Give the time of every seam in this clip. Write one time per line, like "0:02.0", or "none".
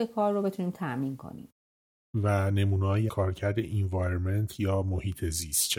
0:03.1